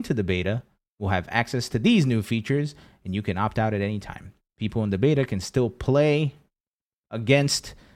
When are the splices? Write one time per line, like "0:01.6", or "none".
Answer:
none